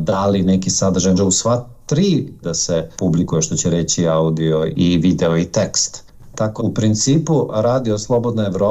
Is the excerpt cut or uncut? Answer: cut